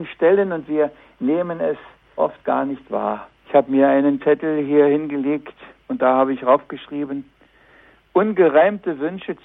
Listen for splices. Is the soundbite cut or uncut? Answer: cut